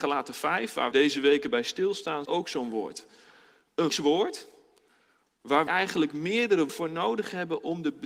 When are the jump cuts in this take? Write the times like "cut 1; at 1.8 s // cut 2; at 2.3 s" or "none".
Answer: cut 1; at 0.9 s // cut 2; at 2.2 s // cut 3; at 3.9 s // cut 4; at 5.7 s // cut 5; at 6.7 s